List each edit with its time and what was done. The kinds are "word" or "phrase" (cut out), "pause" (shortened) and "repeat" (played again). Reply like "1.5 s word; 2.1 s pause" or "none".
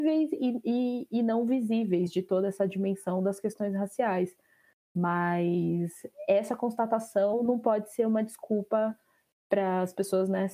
none

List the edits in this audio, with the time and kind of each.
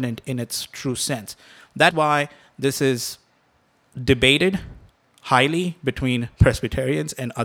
1.9 s word

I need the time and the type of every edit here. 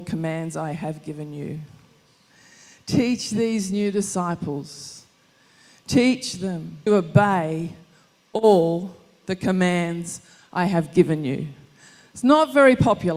6.9 s word

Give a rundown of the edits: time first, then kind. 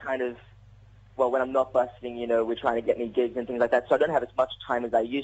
none

